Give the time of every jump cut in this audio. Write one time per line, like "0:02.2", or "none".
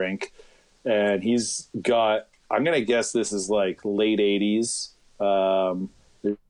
0:02.4